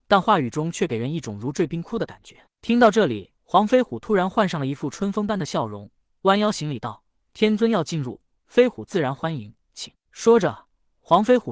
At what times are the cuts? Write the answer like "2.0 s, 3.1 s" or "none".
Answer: 3.4 s, 9.6 s